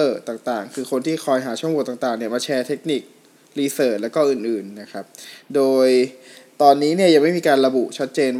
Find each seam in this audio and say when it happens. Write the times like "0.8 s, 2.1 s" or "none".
none